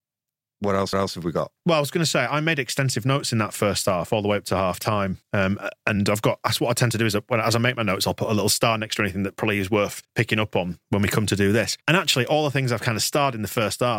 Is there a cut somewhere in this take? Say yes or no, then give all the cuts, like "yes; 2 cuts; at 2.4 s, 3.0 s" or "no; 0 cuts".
yes; 5 cuts; at 0.9 s, 5.2 s, 10.0 s, 10.8 s, 11.8 s